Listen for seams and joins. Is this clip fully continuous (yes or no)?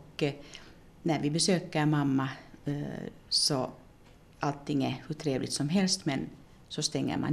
yes